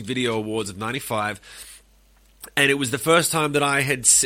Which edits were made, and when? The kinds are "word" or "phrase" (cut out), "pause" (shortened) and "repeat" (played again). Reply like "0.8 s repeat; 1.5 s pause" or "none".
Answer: none